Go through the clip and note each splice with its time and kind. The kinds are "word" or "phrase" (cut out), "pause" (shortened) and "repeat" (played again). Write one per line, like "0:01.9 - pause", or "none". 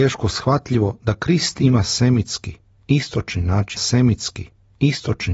0:03.8 - repeat